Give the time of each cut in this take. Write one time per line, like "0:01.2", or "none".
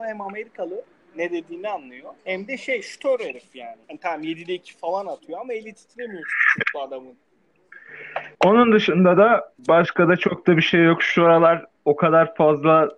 0:02.2
0:03.8
0:08.3
0:09.6

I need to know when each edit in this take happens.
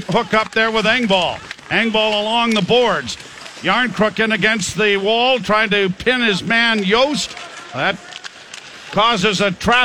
none

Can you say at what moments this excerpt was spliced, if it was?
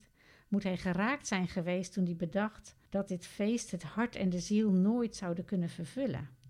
0:02.9

